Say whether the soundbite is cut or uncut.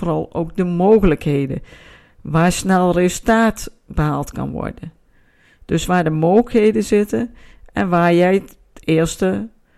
uncut